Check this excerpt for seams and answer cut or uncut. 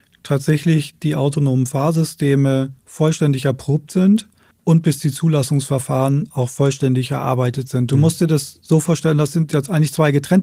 cut